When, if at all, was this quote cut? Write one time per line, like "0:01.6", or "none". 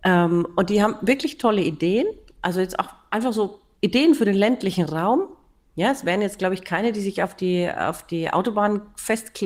none